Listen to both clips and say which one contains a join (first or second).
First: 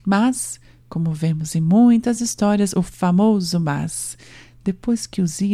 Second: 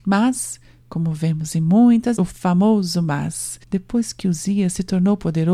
second